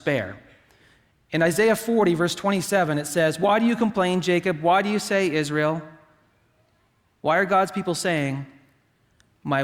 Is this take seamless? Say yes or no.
yes